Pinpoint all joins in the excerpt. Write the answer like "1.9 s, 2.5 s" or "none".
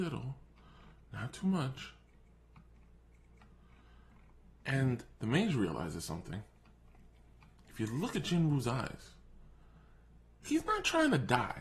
8.1 s